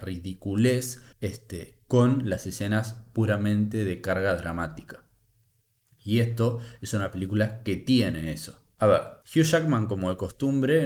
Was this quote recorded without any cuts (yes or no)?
no